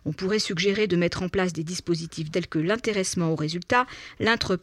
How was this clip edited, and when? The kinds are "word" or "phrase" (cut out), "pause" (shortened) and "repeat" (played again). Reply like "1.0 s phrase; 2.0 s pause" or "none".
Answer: 2.3 s word